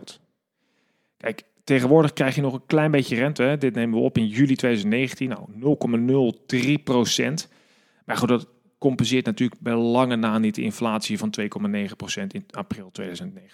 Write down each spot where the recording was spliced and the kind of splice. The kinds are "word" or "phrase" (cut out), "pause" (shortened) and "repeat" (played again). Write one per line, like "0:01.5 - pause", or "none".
none